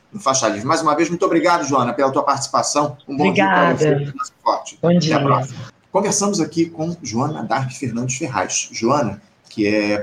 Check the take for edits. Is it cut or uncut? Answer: uncut